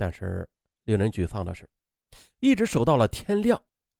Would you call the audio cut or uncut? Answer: uncut